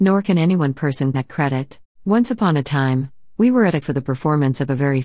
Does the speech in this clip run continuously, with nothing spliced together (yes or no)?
no